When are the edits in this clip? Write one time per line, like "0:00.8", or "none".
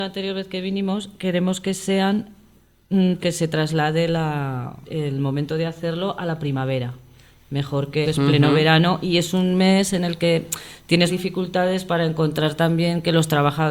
0:03.2
0:04.8
0:08.0
0:11.1
0:11.9